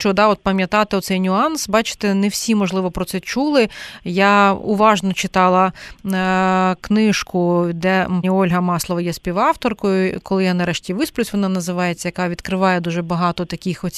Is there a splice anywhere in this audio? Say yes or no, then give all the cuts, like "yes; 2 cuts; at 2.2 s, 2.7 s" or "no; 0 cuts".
yes; 1 cut; at 8.2 s